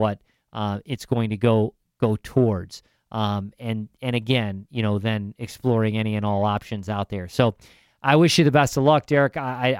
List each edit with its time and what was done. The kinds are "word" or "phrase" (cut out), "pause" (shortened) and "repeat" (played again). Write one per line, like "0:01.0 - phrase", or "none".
none